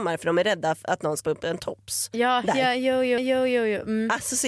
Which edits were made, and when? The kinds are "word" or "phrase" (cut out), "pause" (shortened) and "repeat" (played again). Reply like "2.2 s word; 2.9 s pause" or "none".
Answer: 1.2 s word; 3.2 s repeat